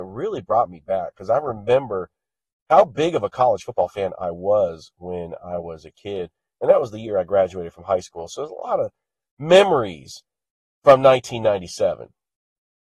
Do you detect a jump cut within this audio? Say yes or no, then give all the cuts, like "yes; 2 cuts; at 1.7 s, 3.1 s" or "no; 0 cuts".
no; 0 cuts